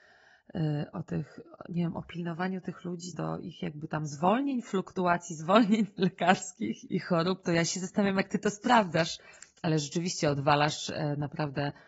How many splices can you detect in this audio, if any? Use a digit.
2